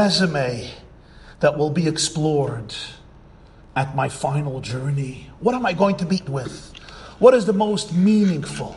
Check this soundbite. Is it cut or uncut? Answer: cut